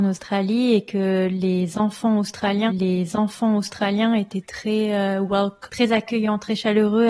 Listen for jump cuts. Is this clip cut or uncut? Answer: cut